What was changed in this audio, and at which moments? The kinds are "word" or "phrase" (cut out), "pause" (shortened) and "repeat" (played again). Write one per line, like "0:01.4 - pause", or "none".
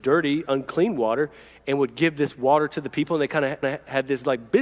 0:03.6 - repeat